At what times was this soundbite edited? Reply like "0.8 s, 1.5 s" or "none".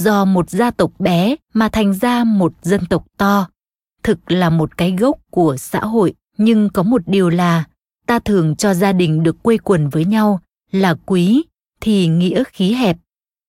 1.4 s, 6.2 s